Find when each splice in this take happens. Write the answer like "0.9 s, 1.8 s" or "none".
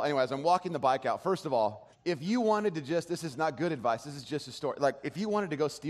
1.9 s